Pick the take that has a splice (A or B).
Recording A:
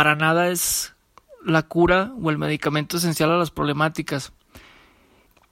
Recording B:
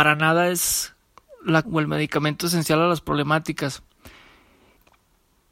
B